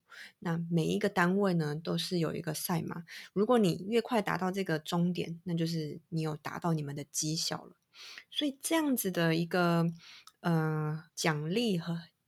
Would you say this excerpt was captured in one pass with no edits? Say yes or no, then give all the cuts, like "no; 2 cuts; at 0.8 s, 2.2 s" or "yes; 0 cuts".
no; 1 cut; at 11.1 s